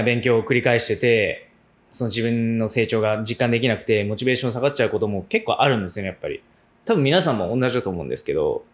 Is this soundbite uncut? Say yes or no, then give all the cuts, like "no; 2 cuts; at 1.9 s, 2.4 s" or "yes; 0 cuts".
yes; 0 cuts